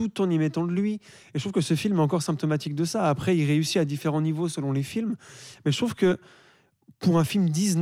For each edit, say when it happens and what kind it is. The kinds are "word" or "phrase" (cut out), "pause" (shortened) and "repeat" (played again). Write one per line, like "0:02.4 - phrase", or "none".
none